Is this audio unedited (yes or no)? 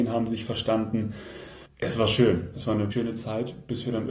no